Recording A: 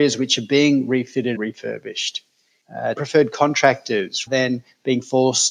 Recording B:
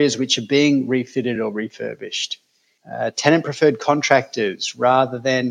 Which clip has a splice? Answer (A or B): A